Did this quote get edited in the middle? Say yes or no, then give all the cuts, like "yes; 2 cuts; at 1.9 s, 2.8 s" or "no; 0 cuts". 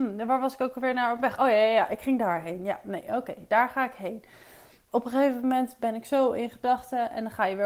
yes; 1 cut; at 4.9 s